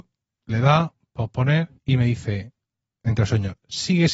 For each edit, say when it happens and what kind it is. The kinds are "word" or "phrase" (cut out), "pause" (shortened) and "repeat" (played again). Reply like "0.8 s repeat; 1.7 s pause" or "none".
1.8 s pause